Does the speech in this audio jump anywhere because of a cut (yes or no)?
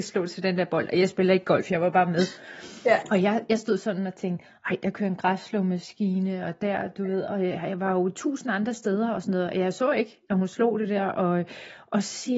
no